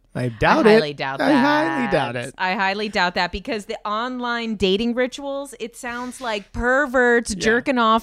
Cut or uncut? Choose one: uncut